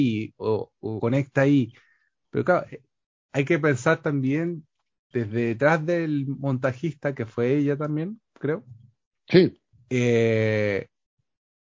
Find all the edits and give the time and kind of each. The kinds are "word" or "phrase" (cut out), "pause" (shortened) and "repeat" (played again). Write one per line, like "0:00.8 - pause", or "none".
0:01.0 - word
0:05.1 - word
0:08.2 - pause
0:09.7 - pause